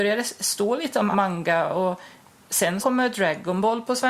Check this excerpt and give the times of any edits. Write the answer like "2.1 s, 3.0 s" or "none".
1.1 s, 2.8 s